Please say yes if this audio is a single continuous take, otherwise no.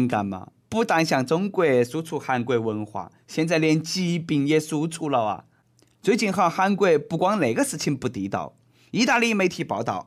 yes